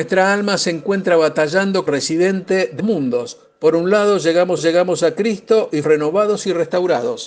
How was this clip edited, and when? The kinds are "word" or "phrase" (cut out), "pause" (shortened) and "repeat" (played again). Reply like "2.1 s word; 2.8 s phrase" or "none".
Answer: 1.9 s word; 2.8 s word; 4.6 s repeat; 5.8 s word